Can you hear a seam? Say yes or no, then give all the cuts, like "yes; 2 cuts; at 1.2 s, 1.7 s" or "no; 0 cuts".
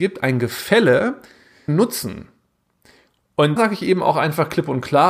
yes; 2 cuts; at 1.7 s, 3.6 s